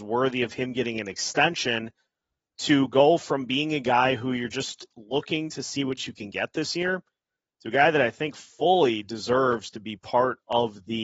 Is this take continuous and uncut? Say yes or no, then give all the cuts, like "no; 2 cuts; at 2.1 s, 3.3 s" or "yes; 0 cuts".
yes; 0 cuts